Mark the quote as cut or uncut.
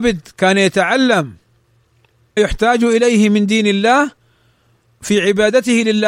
cut